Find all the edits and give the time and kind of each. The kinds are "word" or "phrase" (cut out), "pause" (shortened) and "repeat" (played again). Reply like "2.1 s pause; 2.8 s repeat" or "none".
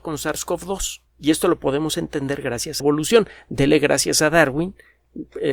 1.1 s pause; 2.8 s phrase